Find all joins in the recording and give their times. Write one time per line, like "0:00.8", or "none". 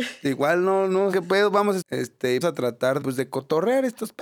0:01.1
0:01.8
0:02.4
0:03.0